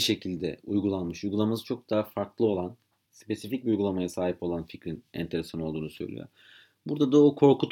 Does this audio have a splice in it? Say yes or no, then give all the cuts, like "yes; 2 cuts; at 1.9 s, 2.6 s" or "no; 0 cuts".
no; 0 cuts